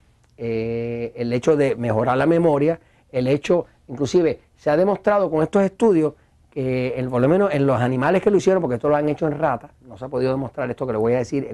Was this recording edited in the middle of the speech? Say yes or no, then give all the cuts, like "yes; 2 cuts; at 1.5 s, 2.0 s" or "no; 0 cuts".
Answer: no; 0 cuts